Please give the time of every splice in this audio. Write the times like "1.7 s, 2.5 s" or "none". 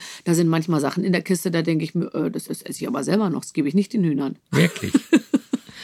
2.5 s